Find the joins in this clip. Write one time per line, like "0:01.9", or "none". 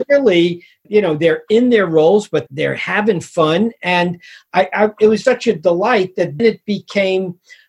0:02.5
0:05.2
0:06.4